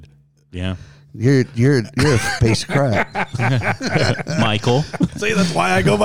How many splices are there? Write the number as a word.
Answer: two